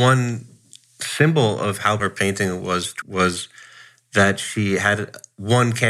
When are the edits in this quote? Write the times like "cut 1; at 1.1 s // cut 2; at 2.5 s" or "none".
cut 1; at 2.0 s // cut 2; at 3.0 s